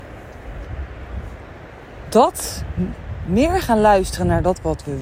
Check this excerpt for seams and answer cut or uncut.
uncut